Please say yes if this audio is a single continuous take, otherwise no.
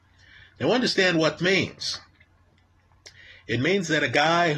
no